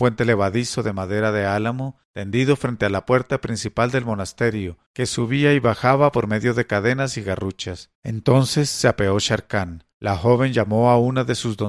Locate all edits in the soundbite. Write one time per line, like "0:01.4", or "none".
0:02.0
0:04.9
0:07.9
0:09.9